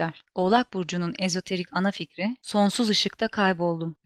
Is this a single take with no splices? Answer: yes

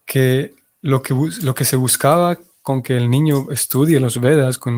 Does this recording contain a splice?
no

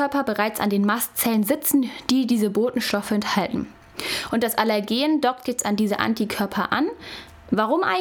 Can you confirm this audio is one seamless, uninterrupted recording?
yes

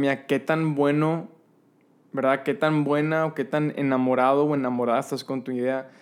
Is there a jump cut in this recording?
no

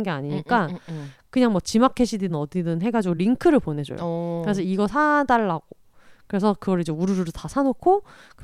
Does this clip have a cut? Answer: no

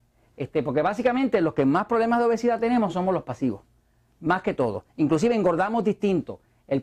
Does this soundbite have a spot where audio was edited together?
no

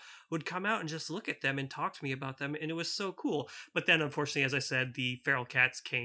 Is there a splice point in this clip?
no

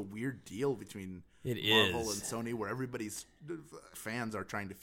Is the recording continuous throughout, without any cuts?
no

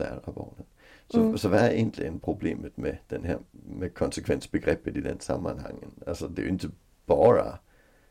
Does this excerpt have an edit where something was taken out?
no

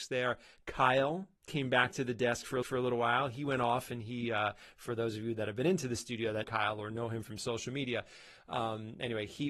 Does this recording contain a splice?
yes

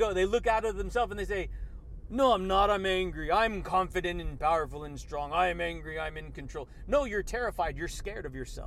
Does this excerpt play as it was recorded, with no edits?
yes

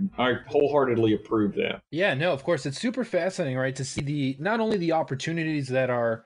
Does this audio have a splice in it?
yes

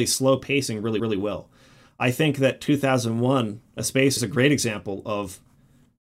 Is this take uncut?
no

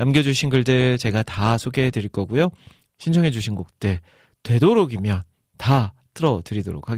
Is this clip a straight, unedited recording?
yes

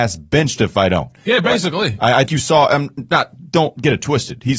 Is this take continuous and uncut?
no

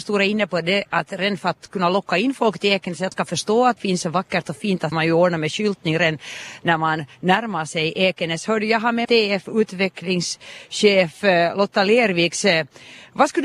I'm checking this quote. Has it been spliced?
yes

